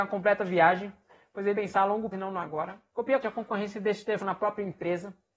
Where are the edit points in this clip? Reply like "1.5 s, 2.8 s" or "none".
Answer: 1.5 s, 2.1 s, 3.2 s, 4.2 s